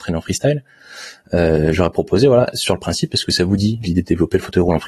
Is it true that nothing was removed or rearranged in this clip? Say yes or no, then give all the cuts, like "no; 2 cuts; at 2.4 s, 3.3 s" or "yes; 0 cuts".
yes; 0 cuts